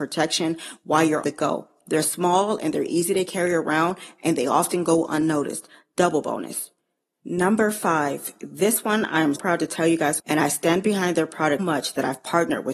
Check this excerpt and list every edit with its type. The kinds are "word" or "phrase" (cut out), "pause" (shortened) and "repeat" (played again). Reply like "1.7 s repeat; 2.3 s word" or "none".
1.2 s word; 9.3 s word; 10.2 s word; 11.6 s word